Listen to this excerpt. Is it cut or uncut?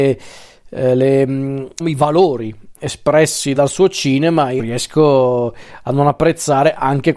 cut